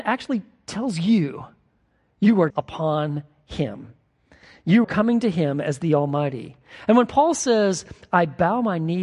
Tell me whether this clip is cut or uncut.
cut